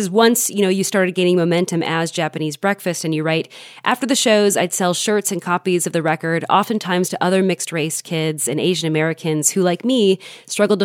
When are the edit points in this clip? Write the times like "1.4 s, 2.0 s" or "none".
none